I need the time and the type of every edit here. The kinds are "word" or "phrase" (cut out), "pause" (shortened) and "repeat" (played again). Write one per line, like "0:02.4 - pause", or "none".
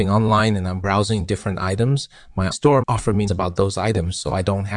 0:02.5 - word
0:02.8 - word
0:03.3 - word